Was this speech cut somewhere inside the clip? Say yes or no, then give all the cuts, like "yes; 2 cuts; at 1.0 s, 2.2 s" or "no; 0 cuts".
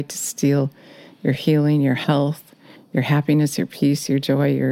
no; 0 cuts